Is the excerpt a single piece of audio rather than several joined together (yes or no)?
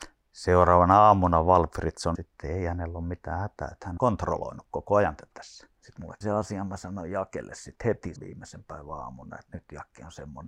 no